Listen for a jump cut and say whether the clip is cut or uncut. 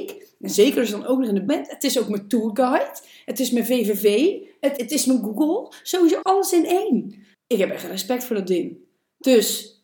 cut